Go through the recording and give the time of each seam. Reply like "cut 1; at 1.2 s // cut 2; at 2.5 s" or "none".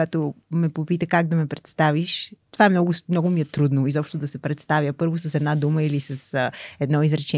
cut 1; at 2.4 s